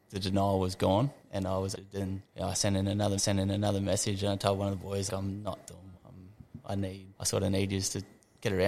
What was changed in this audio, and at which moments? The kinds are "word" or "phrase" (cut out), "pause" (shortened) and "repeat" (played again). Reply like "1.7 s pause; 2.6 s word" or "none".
1.2 s pause; 1.7 s word; 2.3 s pause; 3.2 s repeat; 5.1 s word; 5.9 s word; 7.1 s pause